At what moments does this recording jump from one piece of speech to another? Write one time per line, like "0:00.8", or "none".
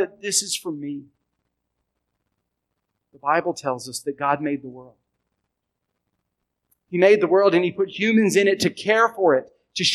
none